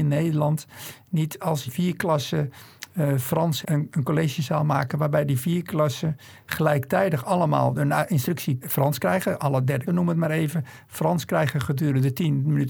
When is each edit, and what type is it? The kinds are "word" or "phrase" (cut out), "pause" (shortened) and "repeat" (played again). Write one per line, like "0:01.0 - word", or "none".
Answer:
0:01.7 - word
0:03.6 - word
0:08.6 - word
0:09.9 - word